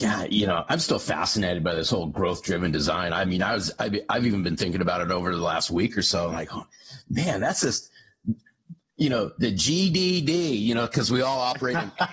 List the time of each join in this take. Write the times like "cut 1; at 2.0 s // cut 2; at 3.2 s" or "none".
none